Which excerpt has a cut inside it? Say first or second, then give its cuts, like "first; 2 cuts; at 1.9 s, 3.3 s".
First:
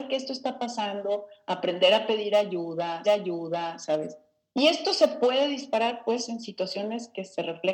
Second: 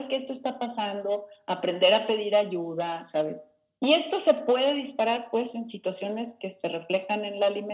first; 1 cut; at 3.0 s